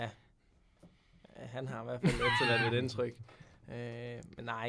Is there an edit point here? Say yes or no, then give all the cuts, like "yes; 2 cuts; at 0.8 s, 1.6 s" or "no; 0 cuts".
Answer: no; 0 cuts